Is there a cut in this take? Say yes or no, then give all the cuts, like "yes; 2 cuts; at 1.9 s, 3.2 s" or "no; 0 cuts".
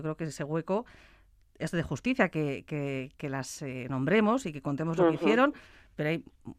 no; 0 cuts